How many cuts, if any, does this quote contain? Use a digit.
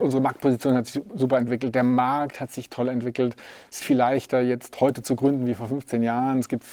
1